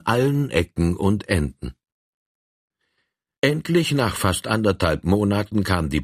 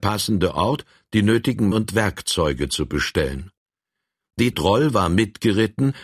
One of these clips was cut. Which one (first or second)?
second